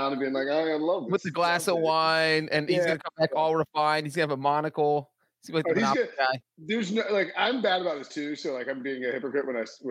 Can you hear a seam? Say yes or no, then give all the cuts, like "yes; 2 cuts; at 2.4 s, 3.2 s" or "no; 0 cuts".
yes; 1 cut; at 6.4 s